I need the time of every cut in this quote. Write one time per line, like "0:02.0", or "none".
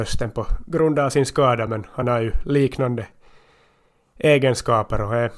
none